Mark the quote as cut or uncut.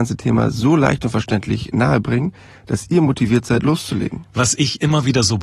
uncut